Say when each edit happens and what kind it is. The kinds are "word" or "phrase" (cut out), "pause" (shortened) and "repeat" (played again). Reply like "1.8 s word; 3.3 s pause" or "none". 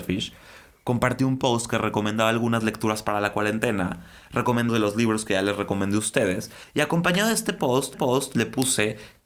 4.7 s word; 7.9 s repeat